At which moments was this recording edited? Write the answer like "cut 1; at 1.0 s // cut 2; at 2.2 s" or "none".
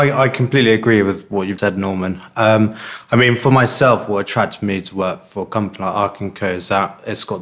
cut 1; at 1.6 s

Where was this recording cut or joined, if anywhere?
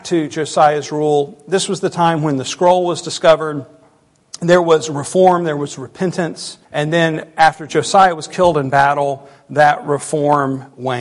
cut 1; at 6.6 s

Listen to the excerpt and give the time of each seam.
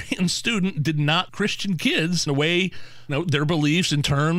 cut 1; at 1.3 s // cut 2; at 2.3 s // cut 3; at 3.1 s

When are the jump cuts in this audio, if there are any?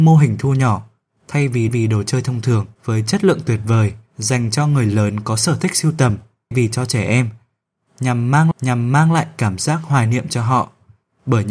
cut 1; at 1.7 s // cut 2; at 2.7 s // cut 3; at 4.1 s // cut 4; at 6.5 s // cut 5; at 8.5 s

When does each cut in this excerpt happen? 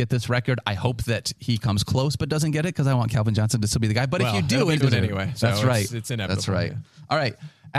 cut 1; at 4.8 s // cut 2; at 5.9 s

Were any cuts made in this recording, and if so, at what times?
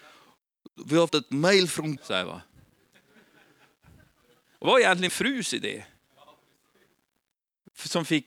cut 1; at 1.1 s // cut 2; at 2.0 s // cut 3; at 4.6 s // cut 4; at 5.1 s

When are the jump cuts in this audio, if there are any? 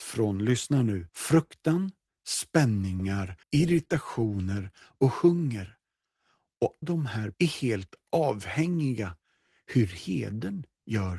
cut 1; at 1.1 s // cut 2; at 3.4 s // cut 3; at 6.8 s // cut 4; at 7.3 s

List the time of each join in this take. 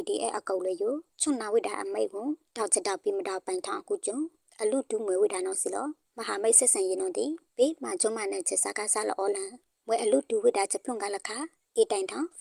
none

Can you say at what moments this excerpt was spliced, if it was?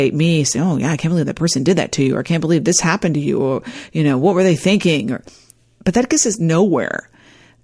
none

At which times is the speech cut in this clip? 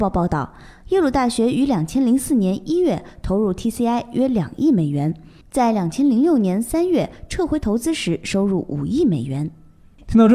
none

